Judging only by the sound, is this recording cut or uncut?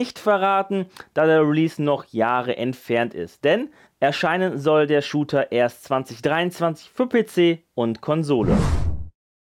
cut